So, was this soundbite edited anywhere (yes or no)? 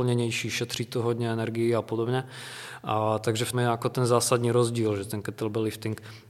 yes